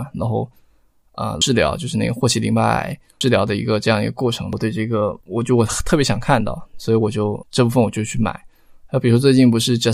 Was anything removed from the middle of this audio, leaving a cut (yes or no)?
yes